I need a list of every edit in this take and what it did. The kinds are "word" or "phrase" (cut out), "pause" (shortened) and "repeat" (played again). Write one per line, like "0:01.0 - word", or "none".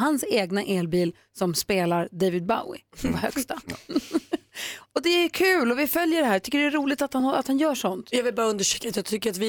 none